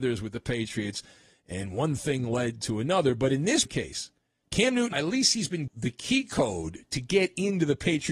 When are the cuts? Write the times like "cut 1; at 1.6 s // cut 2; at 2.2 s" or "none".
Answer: cut 1; at 3.6 s // cut 2; at 4.4 s // cut 3; at 4.9 s // cut 4; at 5.7 s